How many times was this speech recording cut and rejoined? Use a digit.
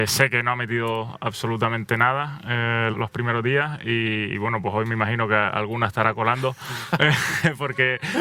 1